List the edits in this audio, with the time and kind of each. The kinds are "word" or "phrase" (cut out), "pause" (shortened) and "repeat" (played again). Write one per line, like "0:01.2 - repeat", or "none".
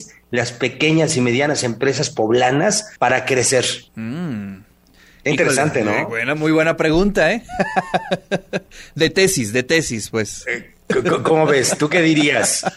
0:03.0 - pause
0:03.9 - pause

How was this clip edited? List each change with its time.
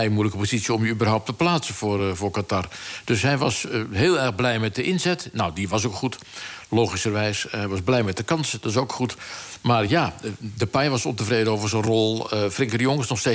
none

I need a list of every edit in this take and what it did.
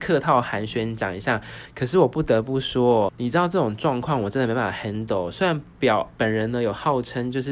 0:03.1 - word

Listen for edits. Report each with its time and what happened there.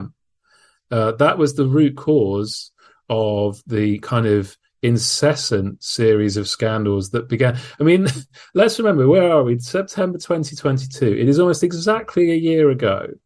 none

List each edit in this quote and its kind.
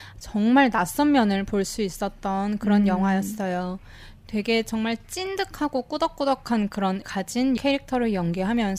0:07.0 - word
0:07.6 - word

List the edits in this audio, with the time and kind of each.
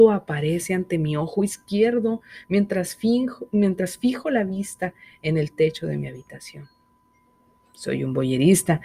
none

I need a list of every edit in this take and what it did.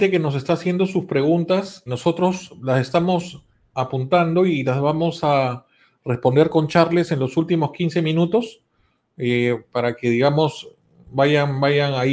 0:01.9 - word

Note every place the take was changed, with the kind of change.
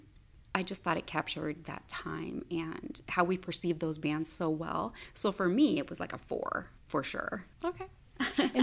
0:06.8 - pause
0:07.5 - pause

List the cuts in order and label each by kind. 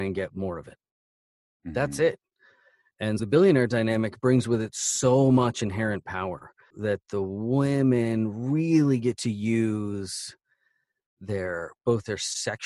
0:03.2 - word
0:06.7 - word

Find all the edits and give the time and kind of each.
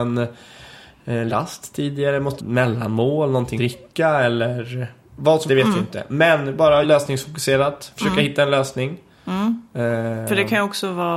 0:01.3 - word
0:02.4 - word
0:03.6 - word
0:05.5 - word
0:06.8 - word

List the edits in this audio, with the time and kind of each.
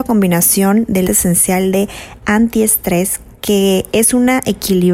0:01.0 - word

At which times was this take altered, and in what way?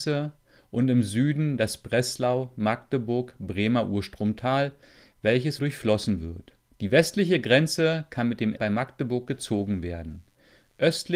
0:05.6 - phrase
0:06.7 - pause
0:08.6 - word

